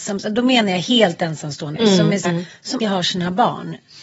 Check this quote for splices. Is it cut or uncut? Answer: cut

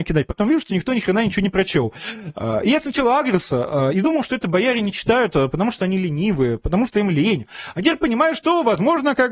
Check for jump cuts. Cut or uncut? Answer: uncut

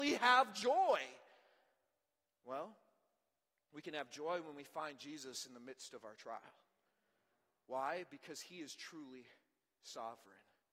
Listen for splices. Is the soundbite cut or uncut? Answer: uncut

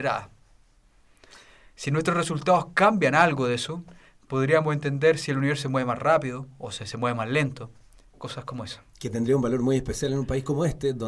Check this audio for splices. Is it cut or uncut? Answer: uncut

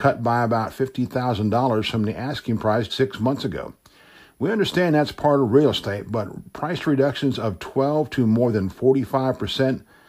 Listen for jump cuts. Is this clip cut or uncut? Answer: cut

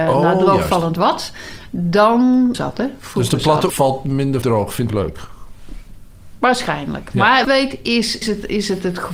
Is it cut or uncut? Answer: cut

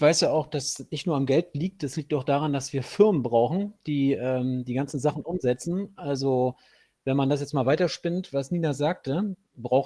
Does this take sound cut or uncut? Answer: uncut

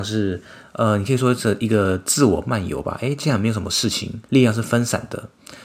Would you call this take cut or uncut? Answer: cut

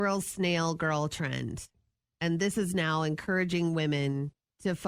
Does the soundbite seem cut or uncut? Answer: uncut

